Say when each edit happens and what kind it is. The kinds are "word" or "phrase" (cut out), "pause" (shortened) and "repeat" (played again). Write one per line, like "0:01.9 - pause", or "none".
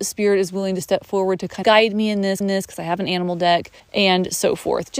0:01.6 - word
0:02.4 - repeat
0:03.8 - pause